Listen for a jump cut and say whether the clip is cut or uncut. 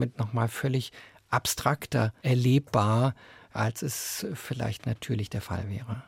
uncut